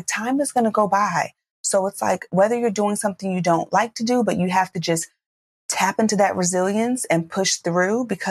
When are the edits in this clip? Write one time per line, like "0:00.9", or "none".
none